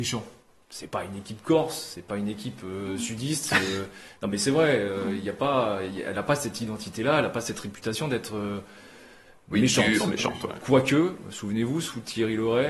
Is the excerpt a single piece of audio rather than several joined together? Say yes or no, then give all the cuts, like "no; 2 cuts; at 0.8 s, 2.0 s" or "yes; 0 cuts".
yes; 0 cuts